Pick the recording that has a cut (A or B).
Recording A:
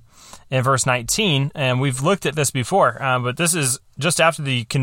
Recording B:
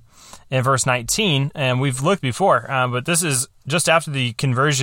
B